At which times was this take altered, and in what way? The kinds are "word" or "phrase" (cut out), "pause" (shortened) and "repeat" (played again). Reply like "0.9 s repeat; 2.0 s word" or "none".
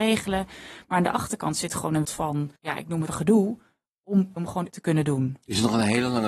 2.0 s word; 2.6 s pause; 3.1 s word; 4.4 s phrase; 4.7 s word